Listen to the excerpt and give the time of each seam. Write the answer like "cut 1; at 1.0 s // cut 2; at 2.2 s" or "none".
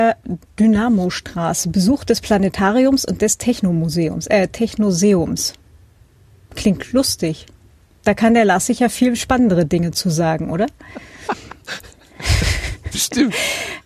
none